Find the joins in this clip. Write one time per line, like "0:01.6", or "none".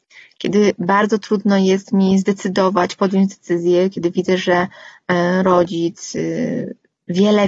none